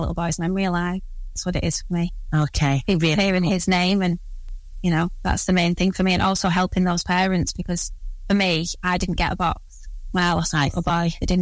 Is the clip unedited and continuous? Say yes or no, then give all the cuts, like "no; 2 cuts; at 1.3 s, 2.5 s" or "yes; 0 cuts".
yes; 0 cuts